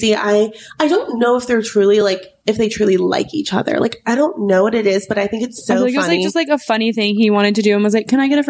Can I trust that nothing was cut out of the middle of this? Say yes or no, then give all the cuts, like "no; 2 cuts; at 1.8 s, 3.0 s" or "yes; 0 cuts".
yes; 0 cuts